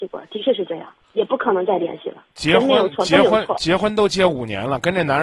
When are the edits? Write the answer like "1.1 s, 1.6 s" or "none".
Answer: 1.0 s, 2.3 s